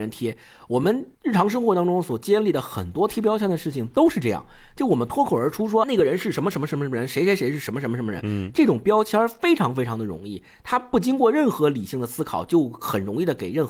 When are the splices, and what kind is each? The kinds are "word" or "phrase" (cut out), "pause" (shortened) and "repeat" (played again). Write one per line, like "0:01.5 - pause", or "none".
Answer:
0:01.1 - pause
0:05.8 - word